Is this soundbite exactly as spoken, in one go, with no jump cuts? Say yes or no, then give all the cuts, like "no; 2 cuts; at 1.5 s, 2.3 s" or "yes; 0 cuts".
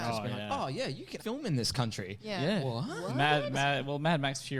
no; 1 cut; at 1.2 s